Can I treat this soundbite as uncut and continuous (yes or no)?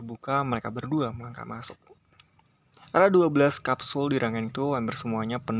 no